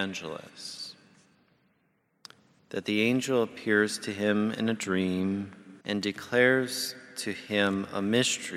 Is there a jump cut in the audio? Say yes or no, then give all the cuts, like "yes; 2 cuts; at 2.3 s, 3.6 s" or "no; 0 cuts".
yes; 1 cut; at 5.8 s